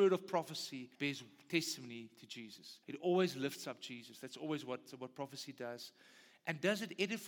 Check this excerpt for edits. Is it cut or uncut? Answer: cut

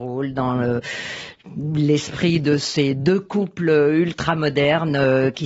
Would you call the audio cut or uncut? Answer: uncut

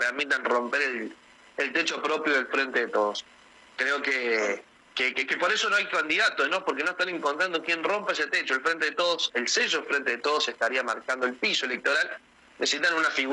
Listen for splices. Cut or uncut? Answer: uncut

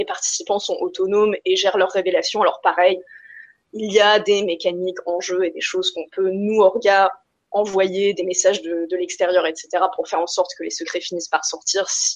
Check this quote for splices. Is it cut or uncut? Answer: uncut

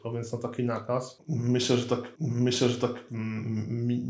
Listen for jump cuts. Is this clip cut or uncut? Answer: cut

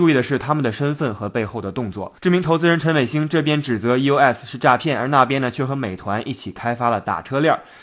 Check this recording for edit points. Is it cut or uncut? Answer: cut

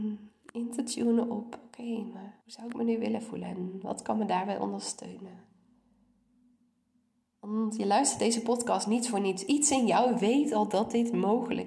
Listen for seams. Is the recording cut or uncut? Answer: cut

